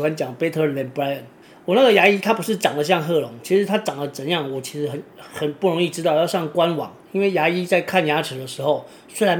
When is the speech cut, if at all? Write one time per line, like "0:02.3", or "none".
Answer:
0:01.4

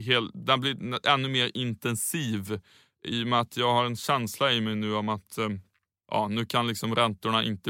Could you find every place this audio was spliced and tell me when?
none

